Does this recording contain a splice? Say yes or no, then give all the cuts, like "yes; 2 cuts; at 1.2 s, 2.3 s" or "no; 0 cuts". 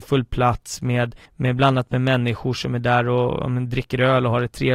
yes; 1 cut; at 1.2 s